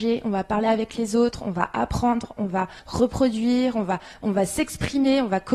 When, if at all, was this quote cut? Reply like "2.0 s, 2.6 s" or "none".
none